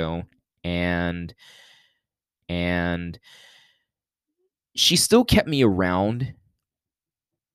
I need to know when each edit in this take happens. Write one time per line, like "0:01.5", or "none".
0:02.4